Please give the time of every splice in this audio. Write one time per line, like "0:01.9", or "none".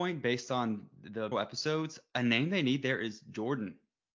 0:01.3